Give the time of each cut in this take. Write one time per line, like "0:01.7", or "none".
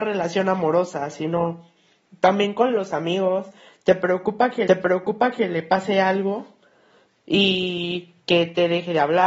0:04.7